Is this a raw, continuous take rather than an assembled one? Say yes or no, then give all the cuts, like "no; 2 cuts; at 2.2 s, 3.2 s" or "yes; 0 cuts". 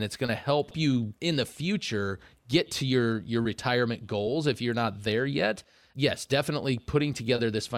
yes; 0 cuts